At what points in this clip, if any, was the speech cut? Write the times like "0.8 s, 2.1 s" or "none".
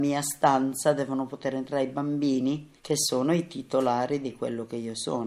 2.8 s